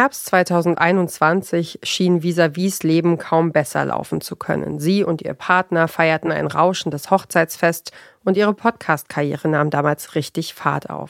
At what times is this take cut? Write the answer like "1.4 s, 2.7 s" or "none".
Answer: none